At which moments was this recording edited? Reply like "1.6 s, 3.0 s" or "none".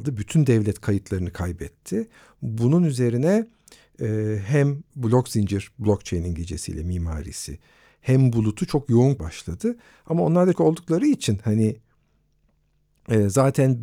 4.9 s, 9.2 s, 10.5 s